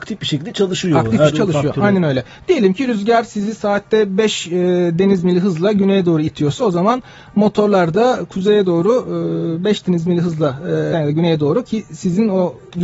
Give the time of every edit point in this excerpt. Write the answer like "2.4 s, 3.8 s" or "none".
1.3 s, 10.9 s